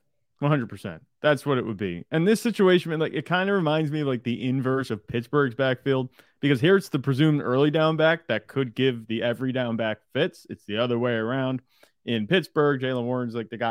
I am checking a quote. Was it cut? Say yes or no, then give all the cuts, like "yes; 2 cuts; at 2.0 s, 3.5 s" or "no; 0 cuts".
no; 0 cuts